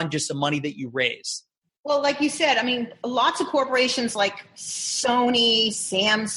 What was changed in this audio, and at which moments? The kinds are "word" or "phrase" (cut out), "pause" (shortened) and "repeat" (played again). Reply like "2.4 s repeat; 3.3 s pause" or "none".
1.7 s pause